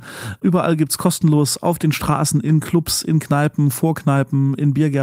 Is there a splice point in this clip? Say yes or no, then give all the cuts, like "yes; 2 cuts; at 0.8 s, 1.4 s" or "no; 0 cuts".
no; 0 cuts